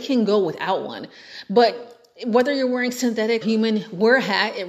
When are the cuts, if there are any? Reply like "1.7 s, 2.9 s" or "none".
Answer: 3.4 s